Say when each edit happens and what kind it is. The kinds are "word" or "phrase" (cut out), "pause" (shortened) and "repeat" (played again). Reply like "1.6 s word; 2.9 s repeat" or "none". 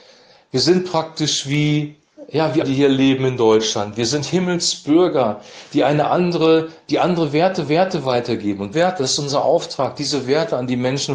2.6 s word; 7.7 s repeat; 8.7 s word